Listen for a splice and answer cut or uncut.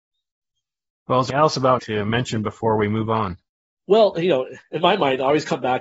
cut